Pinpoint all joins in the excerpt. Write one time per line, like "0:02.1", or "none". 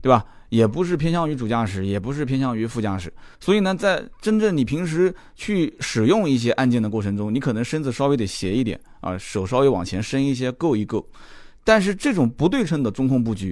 0:03.3